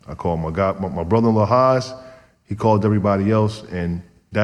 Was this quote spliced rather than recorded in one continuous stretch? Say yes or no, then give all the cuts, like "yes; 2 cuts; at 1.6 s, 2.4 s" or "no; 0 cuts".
no; 0 cuts